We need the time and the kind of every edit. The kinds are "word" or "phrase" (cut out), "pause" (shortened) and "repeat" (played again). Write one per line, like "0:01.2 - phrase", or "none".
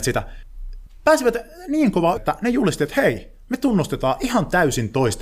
0:02.2 - word